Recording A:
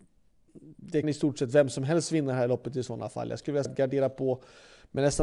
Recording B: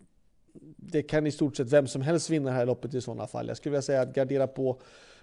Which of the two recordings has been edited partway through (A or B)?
A